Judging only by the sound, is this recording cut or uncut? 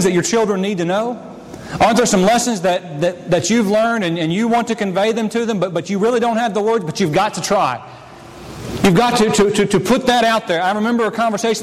uncut